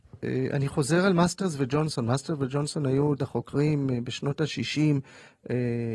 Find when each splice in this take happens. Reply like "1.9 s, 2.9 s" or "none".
3.2 s